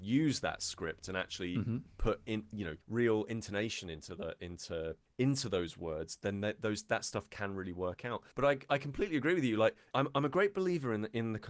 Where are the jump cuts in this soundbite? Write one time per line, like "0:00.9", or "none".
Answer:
0:02.8
0:08.3

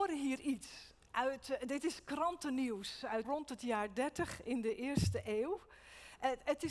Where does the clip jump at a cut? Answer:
0:03.2

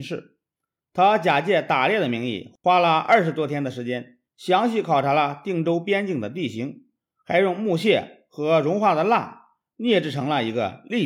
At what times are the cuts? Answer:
0:02.6
0:04.3

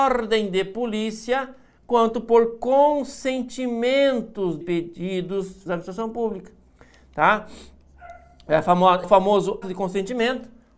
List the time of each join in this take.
0:04.6
0:05.7
0:09.0
0:09.6

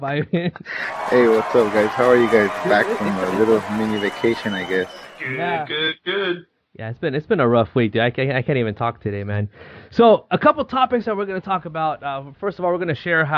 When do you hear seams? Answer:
none

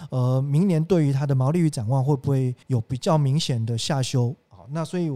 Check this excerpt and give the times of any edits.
0:02.6

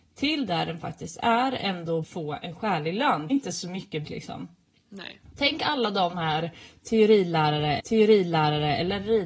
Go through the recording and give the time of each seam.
0:02.0
0:03.3
0:04.0
0:06.1
0:07.8

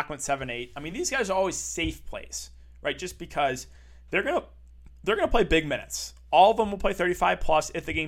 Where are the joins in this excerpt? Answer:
none

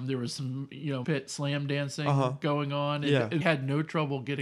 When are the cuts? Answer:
0:01.0
0:03.4

